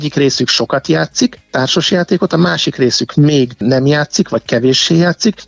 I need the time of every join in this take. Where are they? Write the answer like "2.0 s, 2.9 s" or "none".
none